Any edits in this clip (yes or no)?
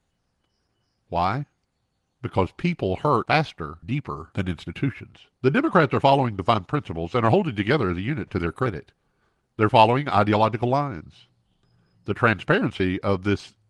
yes